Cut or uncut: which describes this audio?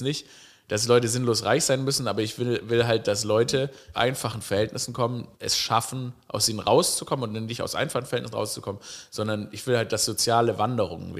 cut